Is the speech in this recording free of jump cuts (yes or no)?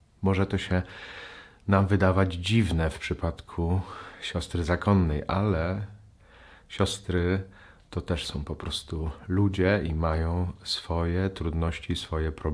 yes